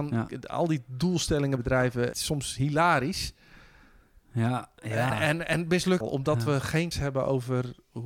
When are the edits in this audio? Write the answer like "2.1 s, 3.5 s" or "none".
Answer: 1.6 s, 2.1 s, 5.1 s, 6.0 s, 6.9 s